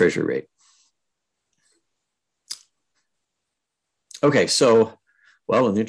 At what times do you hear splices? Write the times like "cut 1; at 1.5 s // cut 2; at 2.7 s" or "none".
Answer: none